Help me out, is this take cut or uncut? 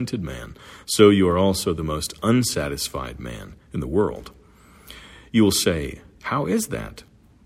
uncut